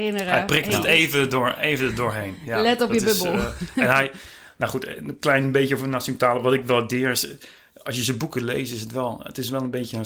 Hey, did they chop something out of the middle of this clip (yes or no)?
no